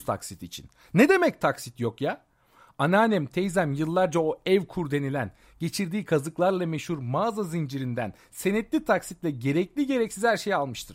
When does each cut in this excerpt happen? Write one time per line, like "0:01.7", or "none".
none